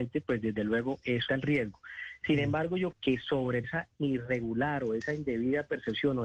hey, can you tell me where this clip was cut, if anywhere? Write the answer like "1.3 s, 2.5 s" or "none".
1.3 s, 2.9 s, 3.6 s